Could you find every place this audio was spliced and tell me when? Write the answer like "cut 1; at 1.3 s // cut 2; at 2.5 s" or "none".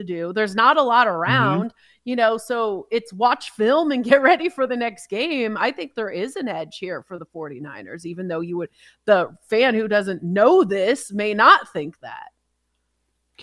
none